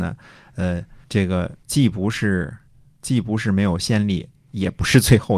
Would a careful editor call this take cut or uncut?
cut